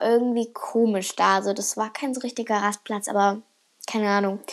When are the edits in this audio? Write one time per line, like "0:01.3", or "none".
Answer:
none